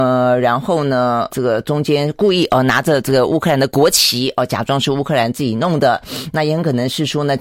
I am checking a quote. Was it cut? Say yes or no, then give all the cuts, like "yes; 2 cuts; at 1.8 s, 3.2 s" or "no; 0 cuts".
yes; 1 cut; at 1.3 s